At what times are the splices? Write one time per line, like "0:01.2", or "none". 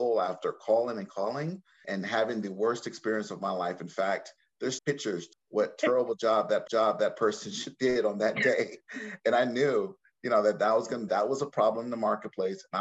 0:01.8
0:04.8
0:05.3
0:06.7
0:11.1

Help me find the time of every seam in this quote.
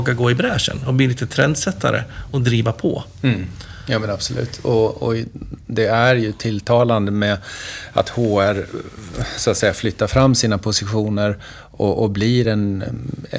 none

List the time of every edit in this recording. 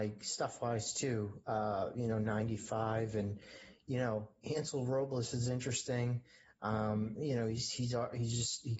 none

